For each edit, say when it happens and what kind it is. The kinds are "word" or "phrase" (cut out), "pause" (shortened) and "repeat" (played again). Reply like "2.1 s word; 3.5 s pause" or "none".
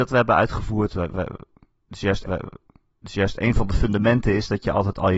2.2 s repeat